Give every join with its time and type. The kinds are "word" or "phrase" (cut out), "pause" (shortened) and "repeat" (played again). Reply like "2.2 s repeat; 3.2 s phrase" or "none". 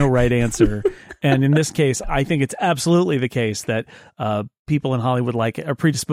2.0 s word